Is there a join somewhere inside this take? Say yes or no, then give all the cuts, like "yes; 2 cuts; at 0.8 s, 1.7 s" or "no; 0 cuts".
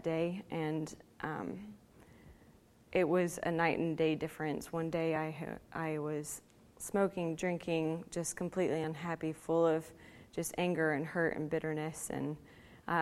no; 0 cuts